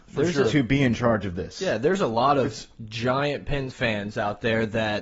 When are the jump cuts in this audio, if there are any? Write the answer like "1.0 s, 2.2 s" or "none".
3.7 s